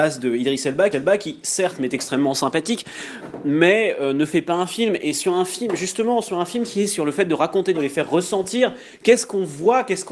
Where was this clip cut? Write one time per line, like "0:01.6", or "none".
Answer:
0:00.9
0:07.7